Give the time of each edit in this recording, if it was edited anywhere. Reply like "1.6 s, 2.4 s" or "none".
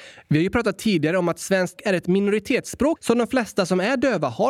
1.8 s, 3.0 s